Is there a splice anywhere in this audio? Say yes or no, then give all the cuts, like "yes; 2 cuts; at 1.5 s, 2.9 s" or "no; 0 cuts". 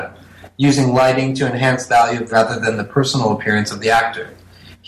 yes; 2 cuts; at 1.9 s, 2.3 s